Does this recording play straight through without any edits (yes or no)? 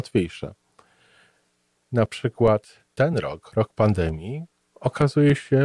yes